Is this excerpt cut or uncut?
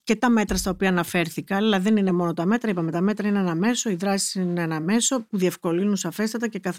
uncut